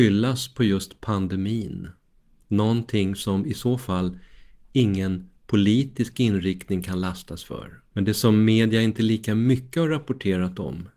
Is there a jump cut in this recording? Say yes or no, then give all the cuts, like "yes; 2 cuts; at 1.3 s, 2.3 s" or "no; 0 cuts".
yes; 2 cuts; at 5.4 s, 7.9 s